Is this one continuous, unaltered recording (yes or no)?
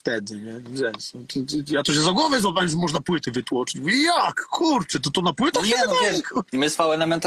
yes